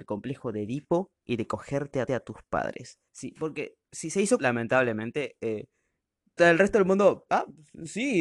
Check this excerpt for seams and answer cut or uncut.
cut